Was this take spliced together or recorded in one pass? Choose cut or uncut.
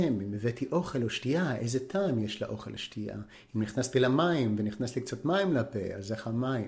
uncut